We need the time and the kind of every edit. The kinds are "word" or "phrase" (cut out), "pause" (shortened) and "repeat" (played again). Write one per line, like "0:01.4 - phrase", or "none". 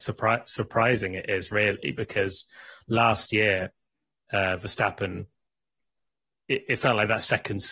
none